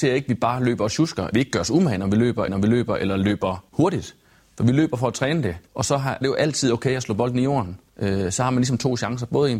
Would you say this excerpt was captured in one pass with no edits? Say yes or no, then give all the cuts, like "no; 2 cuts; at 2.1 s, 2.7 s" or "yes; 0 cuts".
no; 6 cuts; at 1.3 s, 2.5 s, 3.7 s, 5.7 s, 6.2 s, 7.9 s